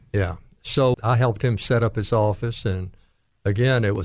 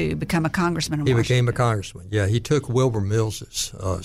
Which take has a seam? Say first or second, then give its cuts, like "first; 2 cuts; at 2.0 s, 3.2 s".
first; 1 cut; at 0.9 s